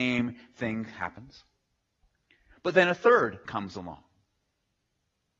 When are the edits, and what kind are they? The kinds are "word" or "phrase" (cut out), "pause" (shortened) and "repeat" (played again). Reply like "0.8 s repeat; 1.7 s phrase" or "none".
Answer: 3.4 s word